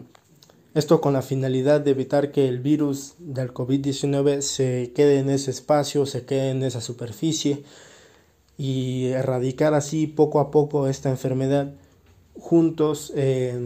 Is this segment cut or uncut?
uncut